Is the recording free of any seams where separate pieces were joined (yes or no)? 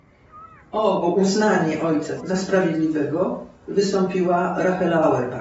no